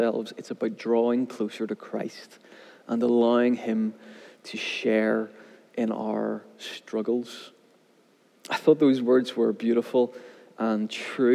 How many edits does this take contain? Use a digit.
0